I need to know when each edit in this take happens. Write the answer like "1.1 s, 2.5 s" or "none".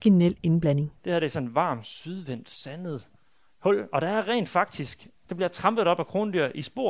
1.0 s, 5.2 s

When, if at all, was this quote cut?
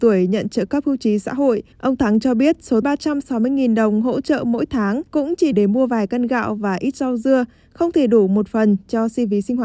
1.7 s, 2.8 s, 5.1 s, 5.5 s

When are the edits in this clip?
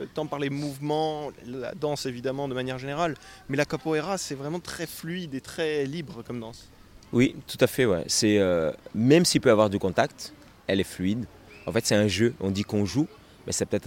10.6 s

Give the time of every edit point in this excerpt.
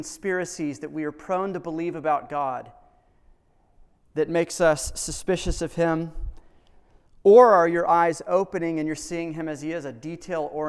none

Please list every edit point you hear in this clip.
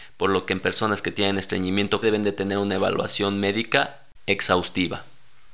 2.0 s

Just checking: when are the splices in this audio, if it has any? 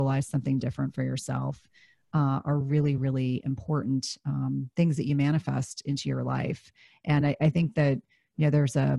none

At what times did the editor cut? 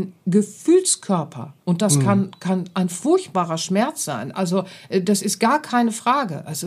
1.6 s

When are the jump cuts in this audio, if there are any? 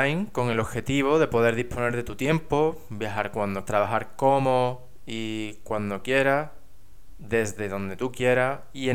3.7 s

